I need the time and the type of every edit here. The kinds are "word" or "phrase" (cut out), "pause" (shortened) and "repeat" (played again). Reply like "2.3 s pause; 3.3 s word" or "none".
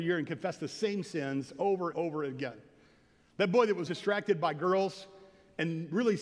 1.9 s word; 3.9 s word